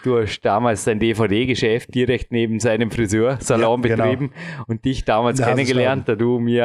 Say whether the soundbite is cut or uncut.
uncut